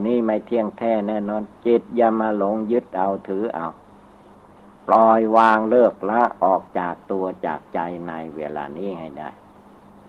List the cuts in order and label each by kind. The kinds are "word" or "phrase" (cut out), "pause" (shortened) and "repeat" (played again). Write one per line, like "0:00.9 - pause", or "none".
0:04.8 - pause